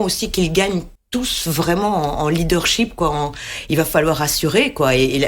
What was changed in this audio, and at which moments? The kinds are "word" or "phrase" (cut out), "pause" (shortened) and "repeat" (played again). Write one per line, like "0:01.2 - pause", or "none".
0:00.9 - pause